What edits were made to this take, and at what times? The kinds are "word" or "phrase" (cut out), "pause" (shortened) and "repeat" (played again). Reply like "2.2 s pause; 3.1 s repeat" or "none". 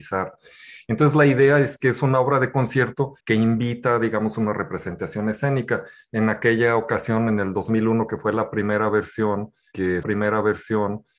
3.2 s pause; 10.0 s repeat